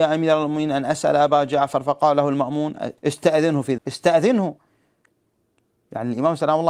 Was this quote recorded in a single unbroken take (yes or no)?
no